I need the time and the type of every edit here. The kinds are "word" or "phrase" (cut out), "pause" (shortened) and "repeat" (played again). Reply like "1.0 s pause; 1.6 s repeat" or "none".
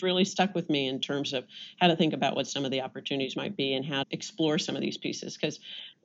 4.0 s word